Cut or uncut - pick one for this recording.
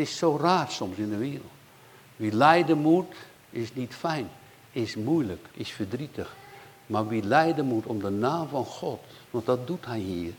cut